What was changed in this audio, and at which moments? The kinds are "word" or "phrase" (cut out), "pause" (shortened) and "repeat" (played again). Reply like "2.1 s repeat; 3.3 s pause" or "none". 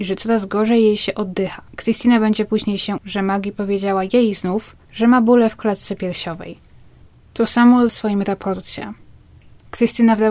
1.7 s pause; 3.0 s word; 4.8 s pause; 7.9 s word

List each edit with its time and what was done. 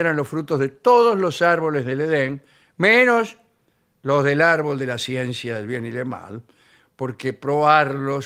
none

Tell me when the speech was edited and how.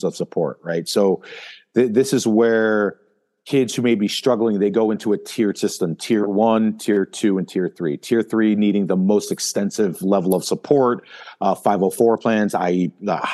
none

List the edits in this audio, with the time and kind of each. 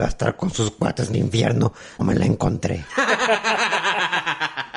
1.1 s word; 2.0 s word

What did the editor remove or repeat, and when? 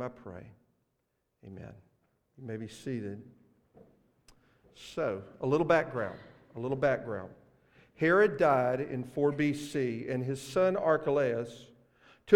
none

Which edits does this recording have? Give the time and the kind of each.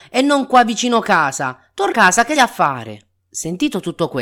1.9 s word; 2.4 s word; 3.2 s pause

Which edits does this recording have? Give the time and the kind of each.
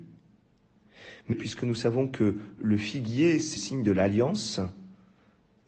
1.3 s word; 2.6 s word; 3.6 s word

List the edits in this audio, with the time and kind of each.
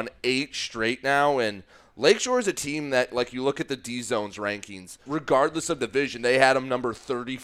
5.1 s word

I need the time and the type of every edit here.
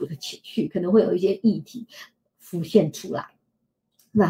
none

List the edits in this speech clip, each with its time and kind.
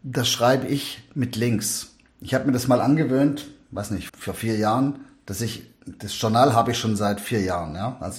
4.1 s word

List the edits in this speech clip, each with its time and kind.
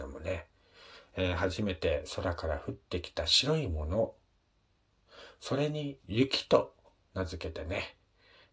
none

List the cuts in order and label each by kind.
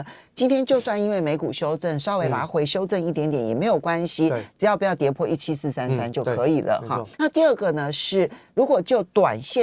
7.1 s pause

